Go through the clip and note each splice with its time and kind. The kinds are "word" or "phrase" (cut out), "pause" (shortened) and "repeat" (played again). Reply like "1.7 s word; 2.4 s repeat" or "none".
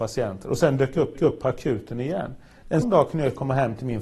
1.1 s repeat; 2.8 s word

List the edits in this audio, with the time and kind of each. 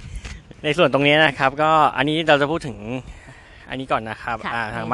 none

